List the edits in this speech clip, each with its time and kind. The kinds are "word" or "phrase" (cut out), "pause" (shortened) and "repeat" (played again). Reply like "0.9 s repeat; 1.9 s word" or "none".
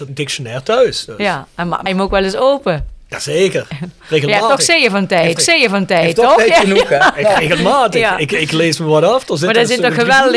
1.9 s word; 3.1 s pause; 5.4 s repeat